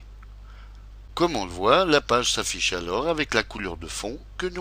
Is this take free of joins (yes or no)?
yes